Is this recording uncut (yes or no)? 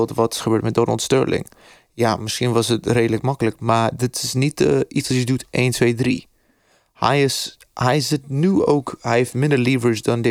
yes